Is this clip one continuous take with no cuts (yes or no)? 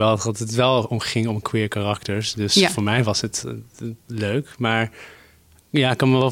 yes